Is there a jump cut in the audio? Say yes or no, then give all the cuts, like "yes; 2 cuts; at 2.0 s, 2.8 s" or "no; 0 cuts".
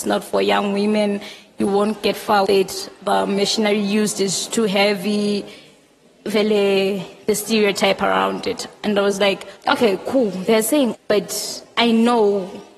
yes; 4 cuts; at 2.4 s, 6.0 s, 9.6 s, 10.9 s